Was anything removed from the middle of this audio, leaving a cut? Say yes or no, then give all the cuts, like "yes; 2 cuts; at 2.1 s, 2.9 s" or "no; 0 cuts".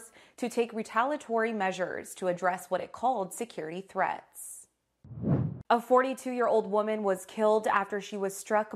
yes; 1 cut; at 5.6 s